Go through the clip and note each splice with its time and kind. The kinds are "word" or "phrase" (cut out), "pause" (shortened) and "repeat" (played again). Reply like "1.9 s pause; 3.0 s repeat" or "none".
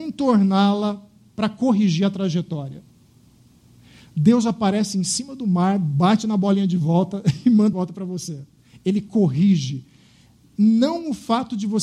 7.7 s word; 8.6 s pause